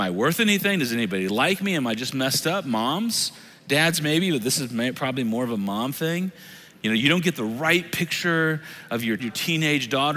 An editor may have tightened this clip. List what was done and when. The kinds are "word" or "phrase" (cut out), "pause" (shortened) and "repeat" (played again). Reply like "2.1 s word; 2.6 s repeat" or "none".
9.2 s word